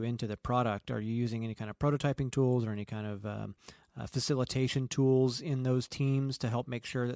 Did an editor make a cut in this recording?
no; 0 cuts

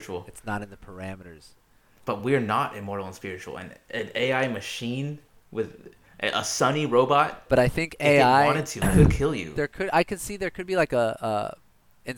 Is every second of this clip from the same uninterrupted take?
yes; 0 cuts

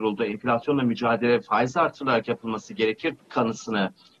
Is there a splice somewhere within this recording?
yes; 1 cut; at 3.2 s

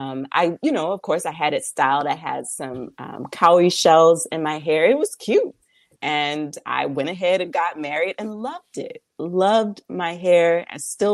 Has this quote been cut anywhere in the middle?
no; 0 cuts

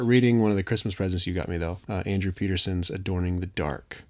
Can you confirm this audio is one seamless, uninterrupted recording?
no; 1 cut; at 1.8 s

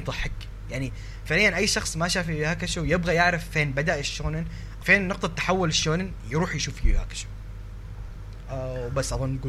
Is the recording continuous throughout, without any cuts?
no; 1 cut; at 4.8 s

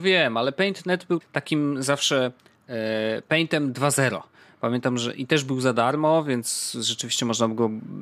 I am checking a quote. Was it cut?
yes; 1 cut; at 1.2 s

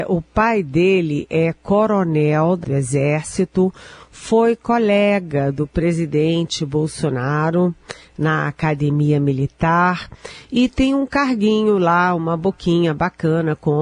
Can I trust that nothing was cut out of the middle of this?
no; 1 cut; at 2.6 s

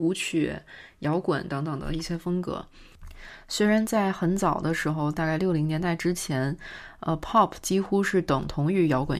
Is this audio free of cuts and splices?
yes; 0 cuts

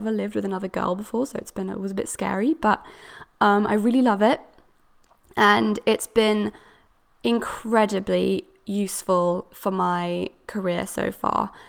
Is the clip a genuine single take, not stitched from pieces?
yes; 0 cuts

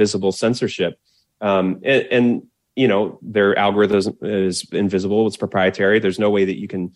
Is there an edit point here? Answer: no; 0 cuts

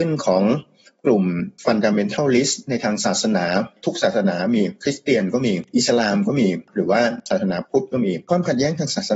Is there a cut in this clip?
no; 0 cuts

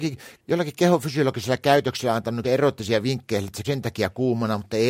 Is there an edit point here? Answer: yes; 2 cuts; at 2.4 s, 3.6 s

